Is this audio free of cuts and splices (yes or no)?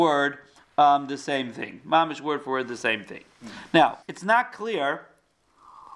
no